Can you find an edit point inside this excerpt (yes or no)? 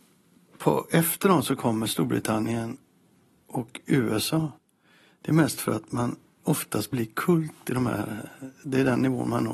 no